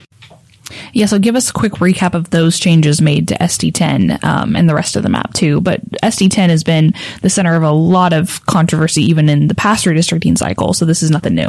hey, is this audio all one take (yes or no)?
yes